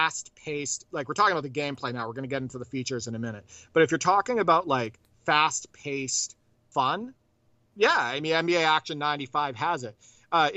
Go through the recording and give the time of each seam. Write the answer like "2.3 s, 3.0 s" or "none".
none